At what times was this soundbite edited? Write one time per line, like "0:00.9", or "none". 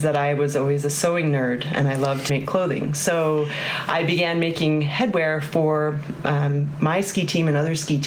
0:02.3